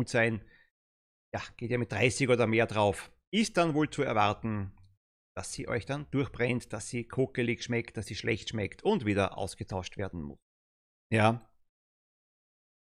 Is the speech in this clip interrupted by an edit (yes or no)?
no